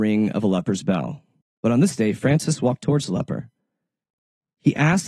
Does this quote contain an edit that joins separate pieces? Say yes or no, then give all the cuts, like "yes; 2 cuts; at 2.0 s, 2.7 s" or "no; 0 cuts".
yes; 1 cut; at 1.4 s